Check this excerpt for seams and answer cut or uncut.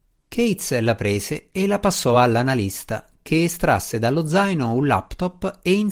uncut